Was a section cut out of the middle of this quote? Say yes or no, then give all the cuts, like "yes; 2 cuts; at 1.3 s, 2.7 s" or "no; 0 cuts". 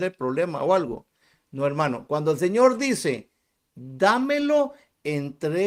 no; 0 cuts